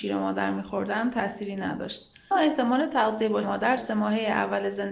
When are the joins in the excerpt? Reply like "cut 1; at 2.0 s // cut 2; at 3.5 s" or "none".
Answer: cut 1; at 2.3 s // cut 2; at 3.4 s // cut 3; at 3.8 s